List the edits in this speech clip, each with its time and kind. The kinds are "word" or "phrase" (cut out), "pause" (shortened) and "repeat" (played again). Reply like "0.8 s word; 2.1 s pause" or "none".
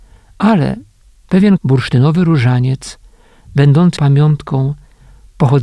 1.6 s word; 4.0 s word

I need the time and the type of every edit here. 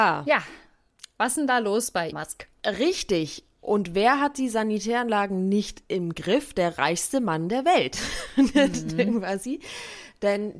2.1 s word

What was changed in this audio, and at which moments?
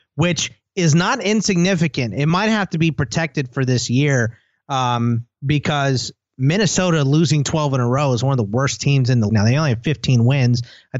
5.3 s pause; 9.3 s word

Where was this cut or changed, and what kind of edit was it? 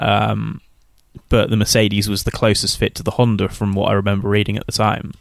none

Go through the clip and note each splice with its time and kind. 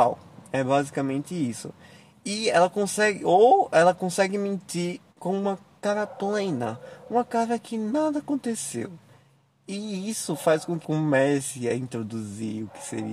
5.1 s pause; 10.8 s phrase

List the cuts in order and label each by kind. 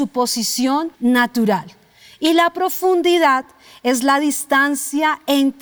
0.9 s pause

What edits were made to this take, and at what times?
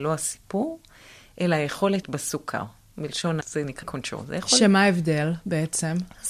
2.0 s word; 3.4 s word; 3.8 s word

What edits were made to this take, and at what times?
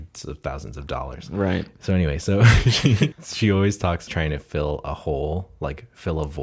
3.1 s word; 4.1 s phrase

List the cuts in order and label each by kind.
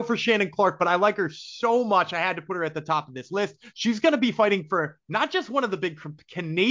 none

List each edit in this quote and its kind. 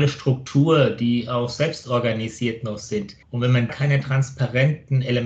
3.2 s pause; 3.7 s word

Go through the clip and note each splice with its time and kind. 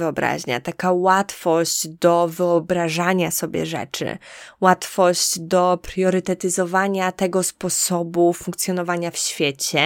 none

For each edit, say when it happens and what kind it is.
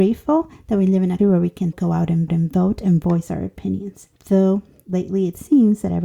1.2 s word; 1.7 s word; 2.3 s repeat; 4.2 s pause

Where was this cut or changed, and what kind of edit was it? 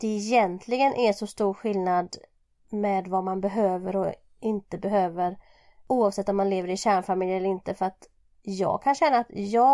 none

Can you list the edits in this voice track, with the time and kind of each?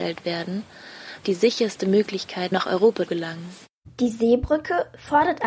1.2 s phrase; 2.5 s phrase; 3.1 s word

